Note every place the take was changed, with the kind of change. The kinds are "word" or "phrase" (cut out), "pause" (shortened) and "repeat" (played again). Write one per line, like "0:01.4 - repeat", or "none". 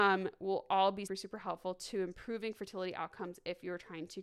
0:01.1 - word